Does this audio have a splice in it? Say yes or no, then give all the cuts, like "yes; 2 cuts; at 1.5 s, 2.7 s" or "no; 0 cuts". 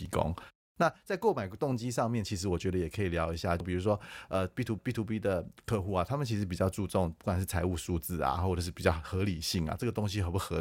yes; 1 cut; at 4.8 s